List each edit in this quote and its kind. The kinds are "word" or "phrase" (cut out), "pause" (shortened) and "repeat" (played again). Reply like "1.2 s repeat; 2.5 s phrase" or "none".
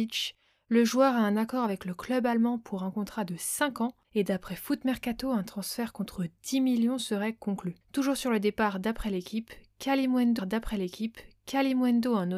4.0 s pause; 7.8 s pause; 10.4 s repeat

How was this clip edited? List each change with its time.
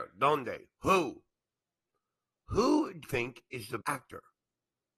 3.0 s word; 3.8 s word

